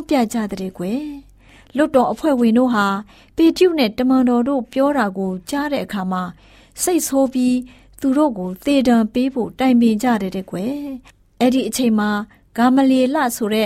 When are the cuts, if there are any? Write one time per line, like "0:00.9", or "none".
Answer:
none